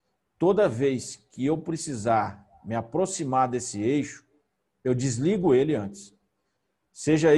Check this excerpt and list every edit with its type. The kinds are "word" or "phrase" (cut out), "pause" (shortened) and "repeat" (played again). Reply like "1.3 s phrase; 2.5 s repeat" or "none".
none